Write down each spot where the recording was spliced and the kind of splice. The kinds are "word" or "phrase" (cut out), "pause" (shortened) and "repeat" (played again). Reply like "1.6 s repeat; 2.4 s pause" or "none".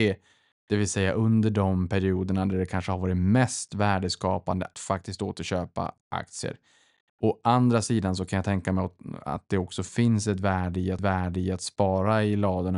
4.7 s word; 11.0 s repeat

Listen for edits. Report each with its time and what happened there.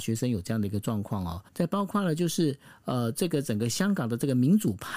1.5 s pause

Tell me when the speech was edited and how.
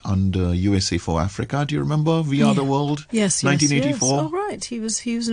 none

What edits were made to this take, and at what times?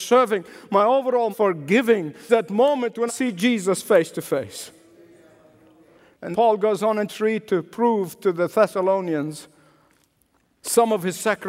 1.3 s word; 2.3 s word; 3.1 s word; 6.3 s word; 7.1 s word

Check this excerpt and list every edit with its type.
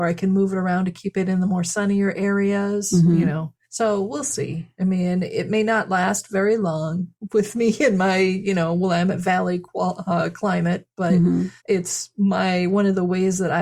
3.6 s pause; 11.6 s pause

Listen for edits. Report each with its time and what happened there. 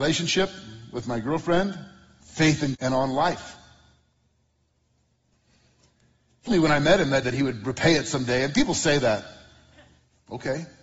2.2 s word; 2.7 s word; 6.5 s word; 7.2 s word

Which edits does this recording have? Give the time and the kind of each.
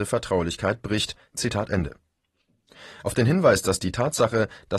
none

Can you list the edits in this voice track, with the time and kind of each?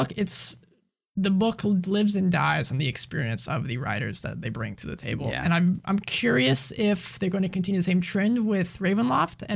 none

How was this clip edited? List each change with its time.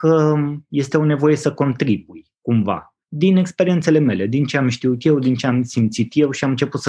3.0 s pause

